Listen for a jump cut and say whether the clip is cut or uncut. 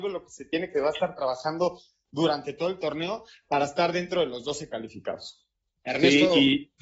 uncut